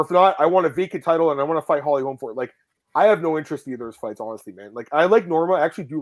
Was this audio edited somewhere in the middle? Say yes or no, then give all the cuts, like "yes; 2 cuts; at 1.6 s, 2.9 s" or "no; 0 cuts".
no; 0 cuts